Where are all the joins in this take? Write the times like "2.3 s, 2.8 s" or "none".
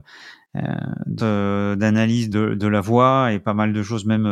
1.2 s, 2.3 s